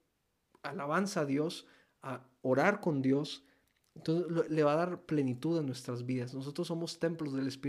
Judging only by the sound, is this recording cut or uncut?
uncut